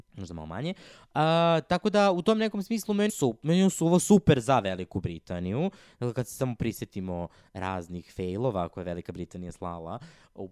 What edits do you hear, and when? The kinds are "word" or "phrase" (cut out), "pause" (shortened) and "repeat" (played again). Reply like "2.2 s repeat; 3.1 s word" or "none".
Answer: 3.1 s word